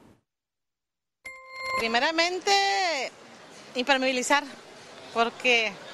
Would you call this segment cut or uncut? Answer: uncut